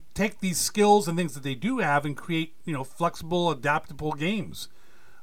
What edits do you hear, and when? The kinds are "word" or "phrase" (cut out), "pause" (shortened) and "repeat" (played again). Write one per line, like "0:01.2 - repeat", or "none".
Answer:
none